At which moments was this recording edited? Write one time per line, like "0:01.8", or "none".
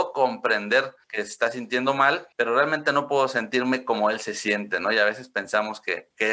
0:01.0
0:02.3